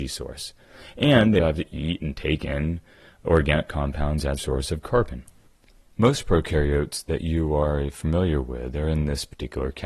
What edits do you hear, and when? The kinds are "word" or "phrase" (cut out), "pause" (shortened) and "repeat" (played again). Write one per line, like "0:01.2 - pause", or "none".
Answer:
0:01.4 - word
0:04.4 - word